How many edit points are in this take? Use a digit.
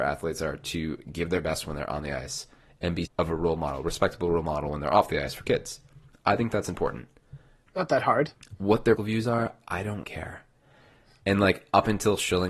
4